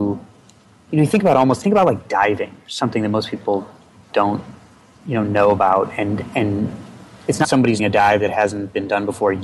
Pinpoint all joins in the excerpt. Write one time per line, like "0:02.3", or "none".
0:01.6
0:07.4
0:07.8